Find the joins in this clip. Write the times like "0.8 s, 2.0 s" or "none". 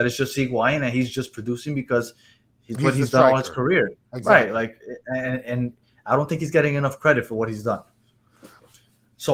none